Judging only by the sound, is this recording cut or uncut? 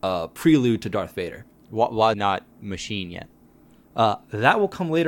cut